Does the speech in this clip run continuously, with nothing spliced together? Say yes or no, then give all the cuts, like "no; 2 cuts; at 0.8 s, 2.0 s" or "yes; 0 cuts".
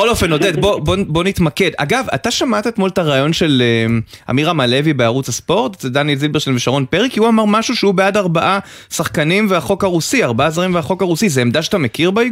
yes; 0 cuts